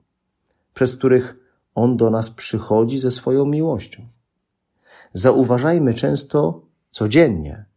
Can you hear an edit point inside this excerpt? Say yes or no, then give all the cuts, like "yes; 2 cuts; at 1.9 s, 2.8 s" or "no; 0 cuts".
no; 0 cuts